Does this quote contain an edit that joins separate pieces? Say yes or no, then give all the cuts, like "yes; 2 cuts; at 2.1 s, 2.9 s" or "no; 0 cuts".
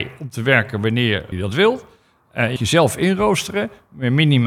yes; 2 cuts; at 1.3 s, 2.6 s